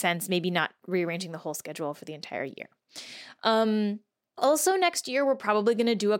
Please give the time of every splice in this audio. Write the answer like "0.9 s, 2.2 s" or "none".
none